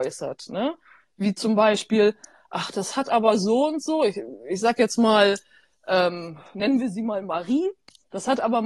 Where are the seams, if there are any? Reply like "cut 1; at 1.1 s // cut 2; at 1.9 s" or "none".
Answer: none